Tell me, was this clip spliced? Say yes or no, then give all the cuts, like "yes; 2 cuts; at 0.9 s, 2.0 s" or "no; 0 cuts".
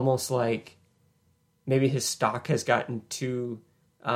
no; 0 cuts